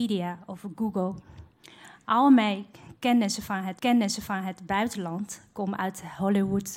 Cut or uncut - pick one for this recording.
cut